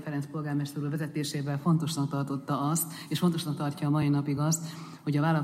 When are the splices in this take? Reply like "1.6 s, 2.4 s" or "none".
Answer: none